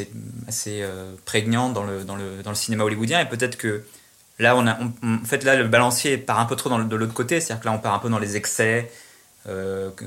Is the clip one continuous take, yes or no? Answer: yes